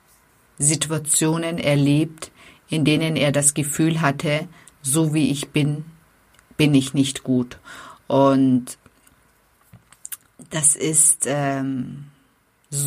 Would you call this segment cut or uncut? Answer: uncut